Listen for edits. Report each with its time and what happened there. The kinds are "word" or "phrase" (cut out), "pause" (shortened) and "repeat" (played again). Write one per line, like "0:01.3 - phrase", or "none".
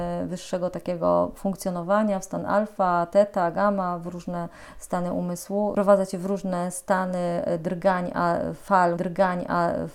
0:09.0 - repeat